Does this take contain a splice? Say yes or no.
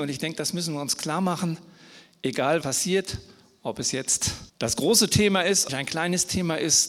yes